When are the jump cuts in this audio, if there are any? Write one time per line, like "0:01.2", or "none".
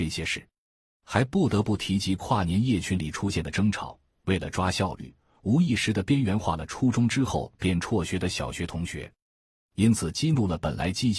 none